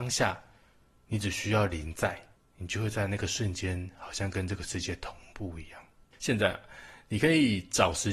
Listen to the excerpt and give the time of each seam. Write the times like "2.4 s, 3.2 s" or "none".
2.3 s, 6.0 s